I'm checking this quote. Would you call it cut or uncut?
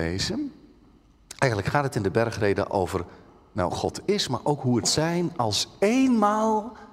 cut